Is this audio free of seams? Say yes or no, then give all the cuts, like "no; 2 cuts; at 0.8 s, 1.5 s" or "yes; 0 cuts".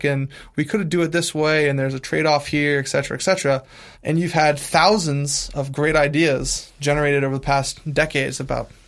no; 1 cut; at 3.9 s